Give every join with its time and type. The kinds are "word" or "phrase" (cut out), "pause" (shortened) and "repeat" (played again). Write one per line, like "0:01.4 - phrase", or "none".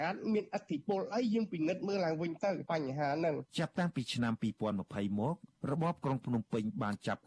0:03.5 - pause
0:05.5 - pause